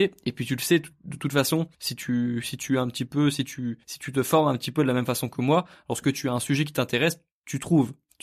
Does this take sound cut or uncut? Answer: cut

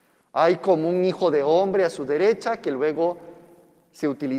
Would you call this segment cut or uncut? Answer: uncut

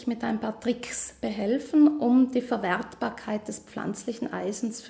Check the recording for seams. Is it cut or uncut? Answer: uncut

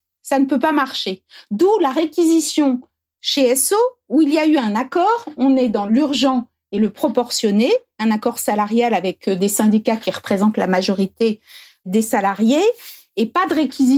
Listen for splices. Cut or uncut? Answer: uncut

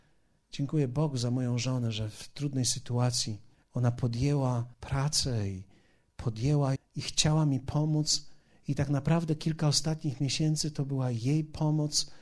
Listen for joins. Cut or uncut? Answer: cut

